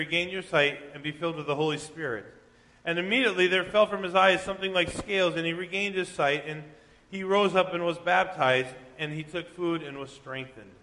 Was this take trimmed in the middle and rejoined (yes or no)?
no